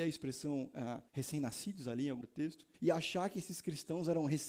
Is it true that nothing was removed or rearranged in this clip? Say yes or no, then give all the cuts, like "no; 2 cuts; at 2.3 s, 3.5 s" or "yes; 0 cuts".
no; 3 cuts; at 1.1 s, 2.2 s, 2.7 s